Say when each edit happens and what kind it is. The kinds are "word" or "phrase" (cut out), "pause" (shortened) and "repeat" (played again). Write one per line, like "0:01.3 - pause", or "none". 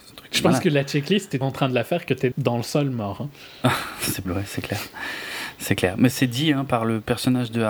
0:01.4 - word
0:02.3 - word
0:04.2 - word
0:06.1 - word